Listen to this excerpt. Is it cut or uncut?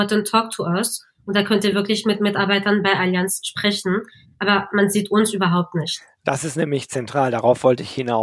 uncut